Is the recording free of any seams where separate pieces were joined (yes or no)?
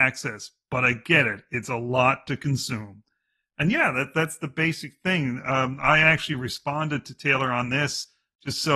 yes